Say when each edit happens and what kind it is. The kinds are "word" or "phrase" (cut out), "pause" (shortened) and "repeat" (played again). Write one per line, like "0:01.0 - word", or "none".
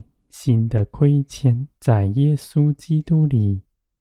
0:01.8 - pause